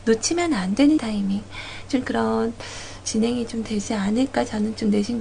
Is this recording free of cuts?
no; 3 cuts; at 1.0 s, 2.0 s, 3.0 s

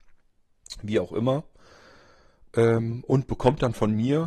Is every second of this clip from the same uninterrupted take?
yes; 0 cuts

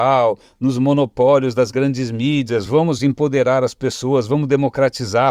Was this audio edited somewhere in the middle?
no; 0 cuts

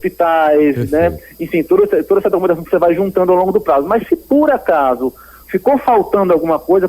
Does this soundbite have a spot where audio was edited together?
no; 0 cuts

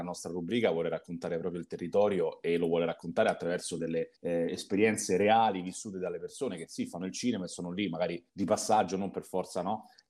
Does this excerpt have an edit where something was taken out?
yes; 2 cuts; at 4.2 s, 8.3 s

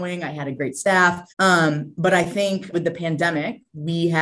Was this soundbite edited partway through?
yes; 2 cuts; at 1.3 s, 2.7 s

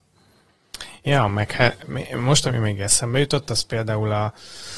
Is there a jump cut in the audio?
no; 0 cuts

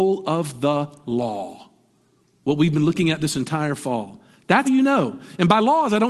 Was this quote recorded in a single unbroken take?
no; 1 cut; at 4.6 s

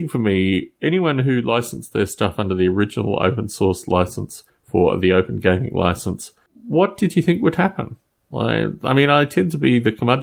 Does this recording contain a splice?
no; 0 cuts

